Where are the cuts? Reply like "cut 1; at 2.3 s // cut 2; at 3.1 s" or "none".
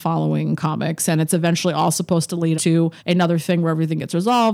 cut 1; at 2.5 s // cut 2; at 3.0 s